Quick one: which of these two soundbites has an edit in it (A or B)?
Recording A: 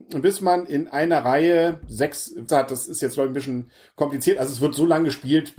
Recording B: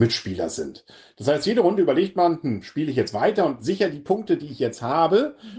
A